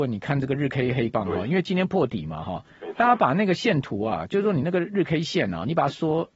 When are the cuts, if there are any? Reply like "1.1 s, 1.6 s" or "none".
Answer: 1.1 s